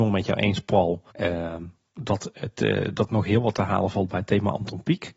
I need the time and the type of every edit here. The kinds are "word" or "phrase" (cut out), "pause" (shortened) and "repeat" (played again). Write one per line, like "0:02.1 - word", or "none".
0:01.1 - pause
0:03.1 - word